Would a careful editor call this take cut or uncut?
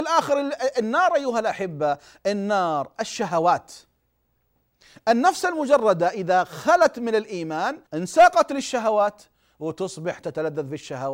cut